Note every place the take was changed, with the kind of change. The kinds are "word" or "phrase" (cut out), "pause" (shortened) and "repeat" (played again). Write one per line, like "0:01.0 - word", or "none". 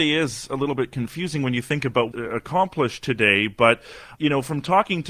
0:02.1 - phrase